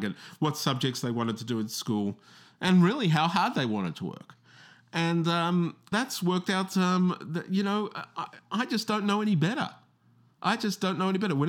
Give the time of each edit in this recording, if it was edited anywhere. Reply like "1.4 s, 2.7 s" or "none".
5.9 s